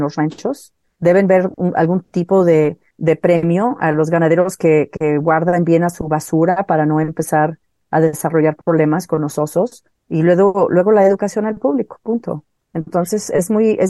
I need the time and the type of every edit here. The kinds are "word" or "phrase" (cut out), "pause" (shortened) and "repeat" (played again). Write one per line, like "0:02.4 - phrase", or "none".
none